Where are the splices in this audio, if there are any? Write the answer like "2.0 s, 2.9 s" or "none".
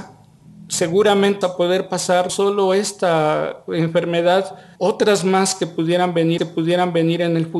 1.4 s, 2.3 s, 4.8 s, 6.4 s

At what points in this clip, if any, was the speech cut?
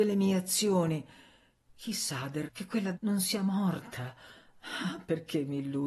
2.5 s, 2.9 s

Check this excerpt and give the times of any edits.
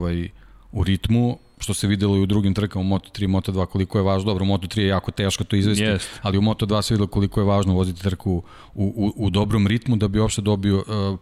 none

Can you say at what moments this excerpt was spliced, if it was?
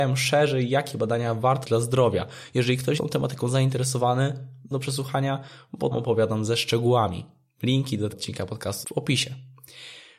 1.6 s, 3.0 s, 4.7 s, 5.9 s, 8.1 s, 8.8 s

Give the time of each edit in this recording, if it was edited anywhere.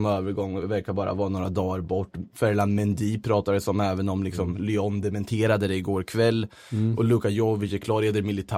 none

